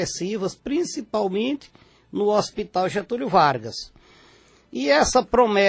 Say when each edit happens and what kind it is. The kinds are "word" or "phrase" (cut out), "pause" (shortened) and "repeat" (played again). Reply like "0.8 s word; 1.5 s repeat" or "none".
none

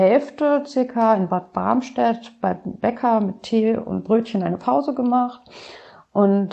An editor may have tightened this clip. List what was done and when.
none

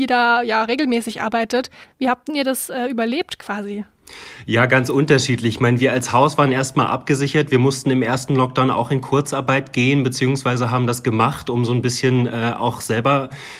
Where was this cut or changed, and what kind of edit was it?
1.8 s pause

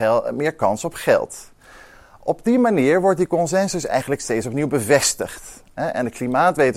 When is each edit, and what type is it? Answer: none

